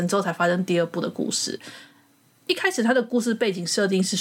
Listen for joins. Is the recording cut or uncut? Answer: uncut